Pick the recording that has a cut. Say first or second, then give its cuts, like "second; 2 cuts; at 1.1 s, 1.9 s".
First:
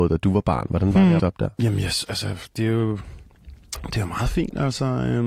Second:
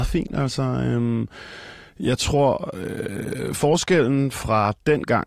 first; 1 cut; at 1.2 s